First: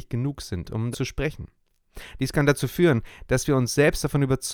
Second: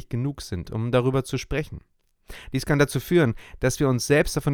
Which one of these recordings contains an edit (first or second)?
first